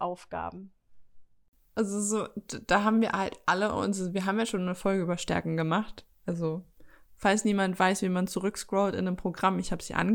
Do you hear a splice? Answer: no; 0 cuts

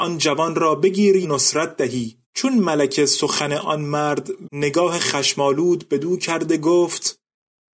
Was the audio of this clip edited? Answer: yes; 3 cuts; at 1.2 s, 2.2 s, 4.4 s

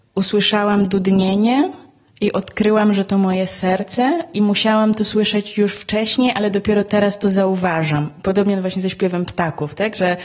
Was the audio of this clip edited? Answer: no; 0 cuts

